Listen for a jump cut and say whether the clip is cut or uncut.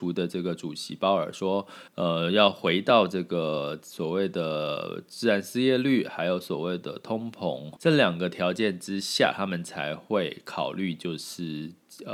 cut